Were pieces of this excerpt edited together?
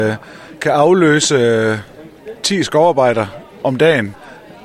no; 0 cuts

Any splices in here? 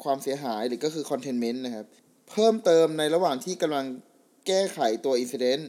no; 0 cuts

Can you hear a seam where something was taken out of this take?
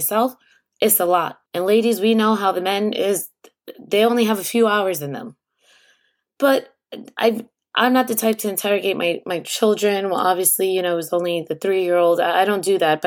yes; 1 cut; at 1.5 s

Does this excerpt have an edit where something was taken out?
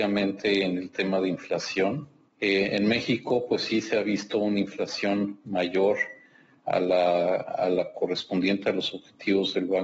no; 0 cuts

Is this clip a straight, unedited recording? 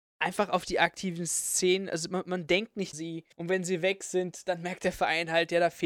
no; 2 cuts; at 2.9 s, 3.3 s

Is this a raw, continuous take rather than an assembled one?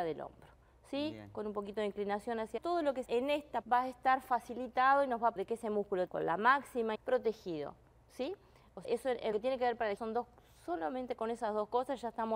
no; 9 cuts; at 2.6 s, 3.1 s, 3.6 s, 5.4 s, 6.1 s, 6.9 s, 8.8 s, 9.3 s, 10.0 s

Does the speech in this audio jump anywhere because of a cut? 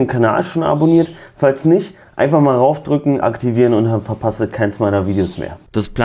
yes; 1 cut; at 3.2 s

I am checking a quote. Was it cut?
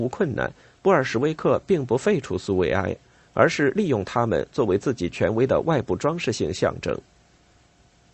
no; 0 cuts

